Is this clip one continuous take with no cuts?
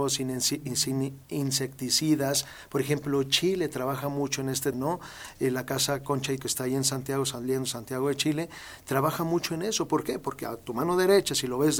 no; 2 cuts; at 4.7 s, 6.4 s

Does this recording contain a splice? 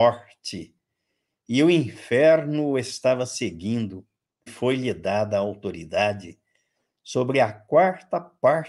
yes; 1 cut; at 4.5 s

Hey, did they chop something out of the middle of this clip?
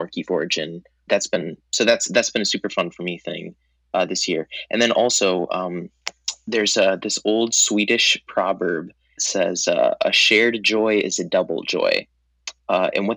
yes; 2 cuts; at 1.1 s, 9.2 s

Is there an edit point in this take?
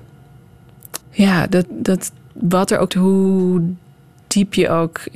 yes; 3 cuts; at 1.0 s, 1.6 s, 2.9 s

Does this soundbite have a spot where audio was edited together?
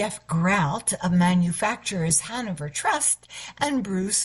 no; 0 cuts

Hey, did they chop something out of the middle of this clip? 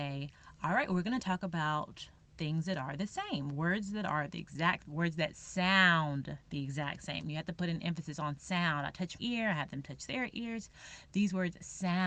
yes; 2 cuts; at 4.8 s, 9.2 s

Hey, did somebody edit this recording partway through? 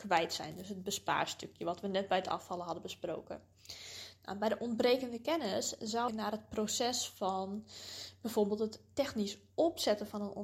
yes; 1 cut; at 6.1 s

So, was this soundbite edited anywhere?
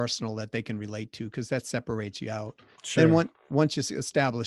yes; 1 cut; at 2.7 s

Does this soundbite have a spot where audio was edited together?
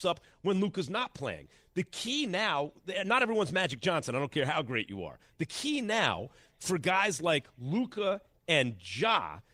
no; 0 cuts

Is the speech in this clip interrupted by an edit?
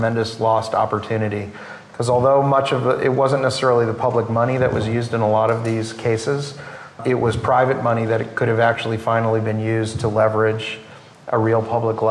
no; 0 cuts

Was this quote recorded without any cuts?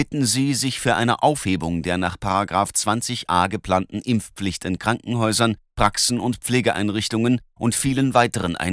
yes; 0 cuts

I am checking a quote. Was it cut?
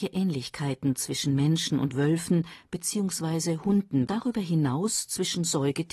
yes; 1 cut; at 4.1 s

